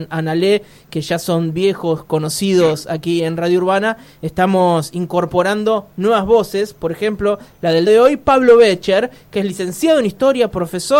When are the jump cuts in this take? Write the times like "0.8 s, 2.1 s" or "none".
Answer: 7.9 s